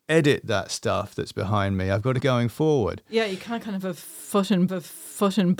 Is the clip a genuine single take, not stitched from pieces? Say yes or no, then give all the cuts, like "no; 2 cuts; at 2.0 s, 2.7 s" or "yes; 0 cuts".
no; 2 cuts; at 2.2 s, 4.7 s